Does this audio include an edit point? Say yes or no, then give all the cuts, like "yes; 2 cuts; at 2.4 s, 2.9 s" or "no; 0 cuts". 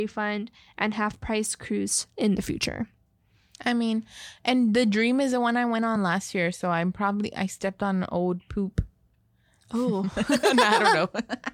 no; 0 cuts